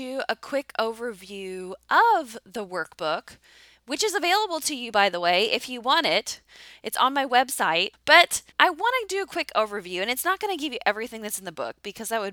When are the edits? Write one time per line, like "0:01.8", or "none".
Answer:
0:08.5